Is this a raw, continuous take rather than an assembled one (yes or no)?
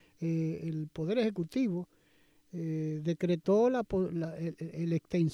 yes